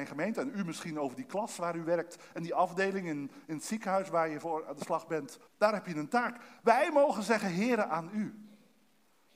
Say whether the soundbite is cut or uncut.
cut